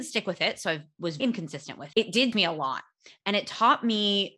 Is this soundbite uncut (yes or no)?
no